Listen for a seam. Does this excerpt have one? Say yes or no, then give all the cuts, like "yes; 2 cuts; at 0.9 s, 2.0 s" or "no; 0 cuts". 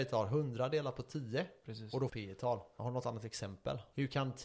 yes; 1 cut; at 2.1 s